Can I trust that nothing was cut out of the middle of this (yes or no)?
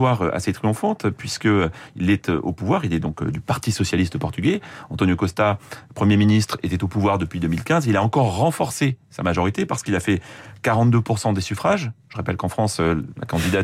yes